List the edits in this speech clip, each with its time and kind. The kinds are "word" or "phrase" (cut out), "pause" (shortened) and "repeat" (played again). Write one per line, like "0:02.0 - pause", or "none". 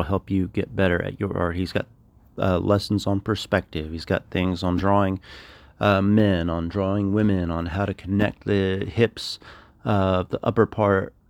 none